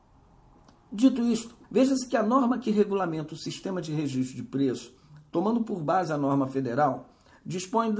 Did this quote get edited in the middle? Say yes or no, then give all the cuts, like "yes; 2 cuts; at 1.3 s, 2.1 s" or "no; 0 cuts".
yes; 1 cut; at 1.6 s